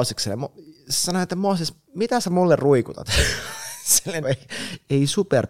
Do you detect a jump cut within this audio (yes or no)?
yes